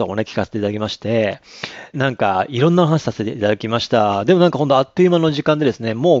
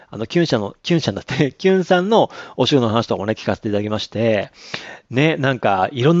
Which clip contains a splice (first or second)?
first